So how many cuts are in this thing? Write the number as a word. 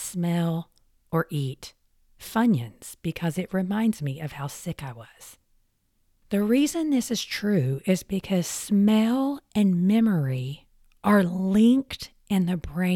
zero